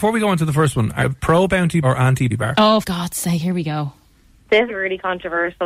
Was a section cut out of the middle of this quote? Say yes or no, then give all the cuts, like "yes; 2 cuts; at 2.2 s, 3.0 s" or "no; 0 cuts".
yes; 5 cuts; at 1.0 s, 1.8 s, 2.3 s, 2.8 s, 4.7 s